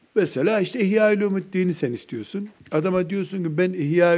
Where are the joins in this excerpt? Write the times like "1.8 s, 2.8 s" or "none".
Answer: 2.6 s